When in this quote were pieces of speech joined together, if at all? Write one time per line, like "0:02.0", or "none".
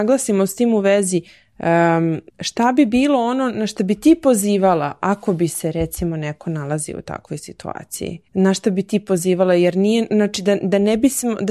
0:02.3
0:08.3